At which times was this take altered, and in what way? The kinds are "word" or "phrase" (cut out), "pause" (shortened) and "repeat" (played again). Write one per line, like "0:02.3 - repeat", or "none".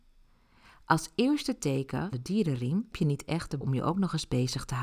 0:02.1 - word
0:02.9 - word
0:03.6 - word